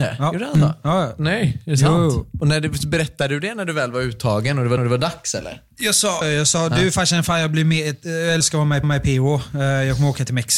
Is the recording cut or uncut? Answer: cut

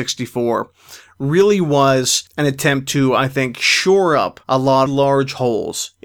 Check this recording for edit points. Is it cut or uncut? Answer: cut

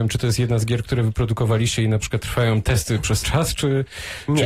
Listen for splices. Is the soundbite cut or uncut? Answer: cut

